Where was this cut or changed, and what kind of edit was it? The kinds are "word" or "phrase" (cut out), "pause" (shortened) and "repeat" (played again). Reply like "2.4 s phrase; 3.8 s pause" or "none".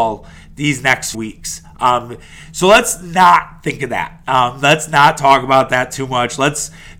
1.1 s word